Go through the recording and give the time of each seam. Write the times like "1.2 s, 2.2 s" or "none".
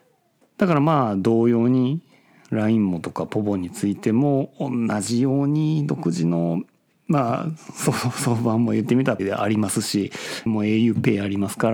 9.2 s, 10.5 s